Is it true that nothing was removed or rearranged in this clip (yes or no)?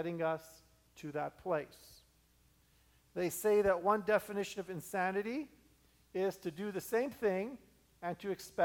yes